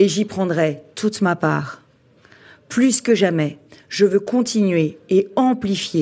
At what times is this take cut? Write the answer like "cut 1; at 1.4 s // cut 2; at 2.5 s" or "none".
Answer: none